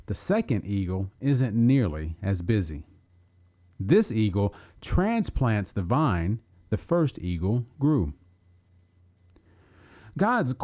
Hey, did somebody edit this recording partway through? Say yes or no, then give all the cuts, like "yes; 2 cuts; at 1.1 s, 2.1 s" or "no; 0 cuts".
no; 0 cuts